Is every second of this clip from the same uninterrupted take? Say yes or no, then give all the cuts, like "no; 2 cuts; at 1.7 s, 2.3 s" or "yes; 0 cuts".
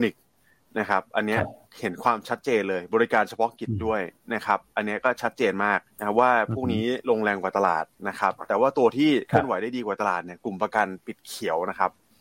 no; 1 cut; at 5.9 s